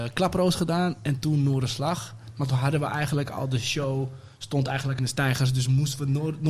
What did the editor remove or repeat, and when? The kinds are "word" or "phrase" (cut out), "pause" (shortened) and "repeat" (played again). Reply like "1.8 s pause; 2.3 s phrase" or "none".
5.0 s word